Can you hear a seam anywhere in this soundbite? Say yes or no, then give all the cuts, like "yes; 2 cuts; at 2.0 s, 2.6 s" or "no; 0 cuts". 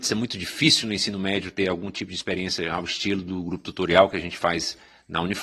no; 0 cuts